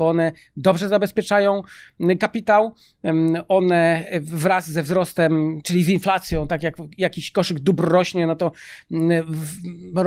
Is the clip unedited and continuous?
yes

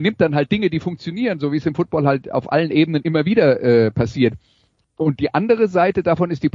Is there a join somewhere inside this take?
no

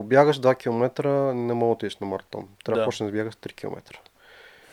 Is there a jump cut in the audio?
no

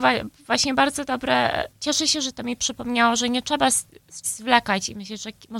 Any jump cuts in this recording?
yes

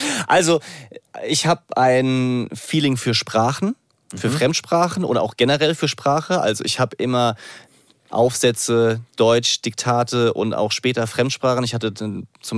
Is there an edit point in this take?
no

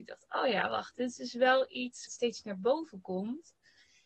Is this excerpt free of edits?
no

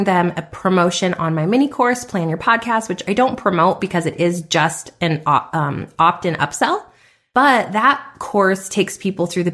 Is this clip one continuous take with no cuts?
yes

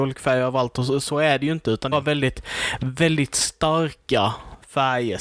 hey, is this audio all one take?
no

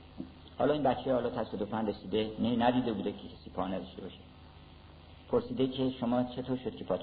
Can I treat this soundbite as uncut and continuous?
yes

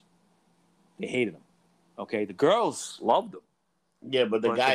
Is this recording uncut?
yes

